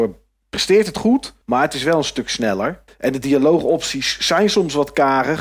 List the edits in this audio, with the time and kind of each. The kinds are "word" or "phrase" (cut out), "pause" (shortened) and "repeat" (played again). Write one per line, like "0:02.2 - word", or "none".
0:01.4 - pause
0:02.9 - pause